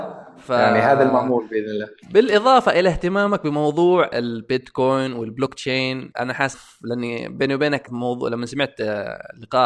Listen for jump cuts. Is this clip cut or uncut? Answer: cut